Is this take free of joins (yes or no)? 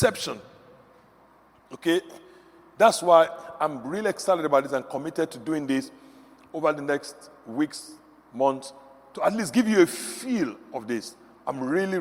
yes